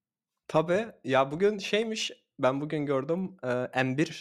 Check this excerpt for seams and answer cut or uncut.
uncut